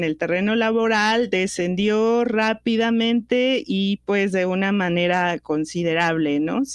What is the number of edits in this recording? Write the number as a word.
zero